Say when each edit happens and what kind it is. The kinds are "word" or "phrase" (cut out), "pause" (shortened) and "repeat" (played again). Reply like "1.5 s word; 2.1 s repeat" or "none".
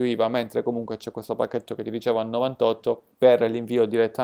3.1 s pause